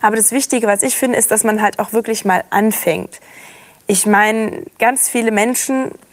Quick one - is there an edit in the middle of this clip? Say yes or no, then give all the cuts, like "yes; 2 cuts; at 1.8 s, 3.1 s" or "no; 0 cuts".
no; 0 cuts